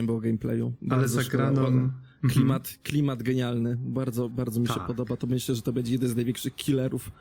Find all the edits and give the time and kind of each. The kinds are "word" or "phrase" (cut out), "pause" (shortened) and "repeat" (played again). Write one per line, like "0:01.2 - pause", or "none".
none